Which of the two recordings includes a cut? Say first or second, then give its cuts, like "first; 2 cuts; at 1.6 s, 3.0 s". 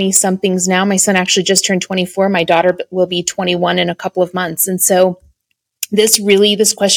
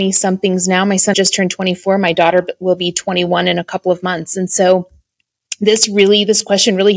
second; 1 cut; at 1.1 s